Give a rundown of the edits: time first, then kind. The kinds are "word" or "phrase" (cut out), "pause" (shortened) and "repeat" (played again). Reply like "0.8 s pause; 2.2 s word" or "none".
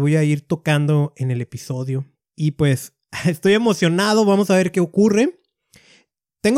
2.1 s pause